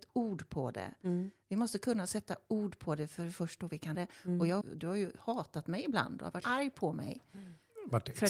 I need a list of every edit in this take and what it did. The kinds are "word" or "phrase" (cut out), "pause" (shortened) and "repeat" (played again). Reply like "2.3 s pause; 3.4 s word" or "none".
3.9 s word; 4.6 s phrase; 6.4 s word